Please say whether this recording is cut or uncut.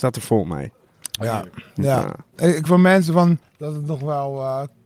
cut